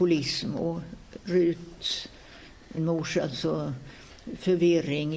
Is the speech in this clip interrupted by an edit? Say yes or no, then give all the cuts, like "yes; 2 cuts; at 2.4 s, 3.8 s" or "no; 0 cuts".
yes; 1 cut; at 2.8 s